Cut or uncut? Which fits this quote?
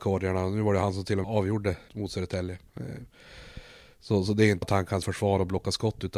cut